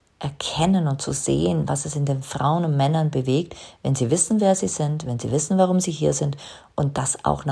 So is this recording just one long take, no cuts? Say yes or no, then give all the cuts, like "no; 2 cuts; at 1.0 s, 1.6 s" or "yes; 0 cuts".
yes; 0 cuts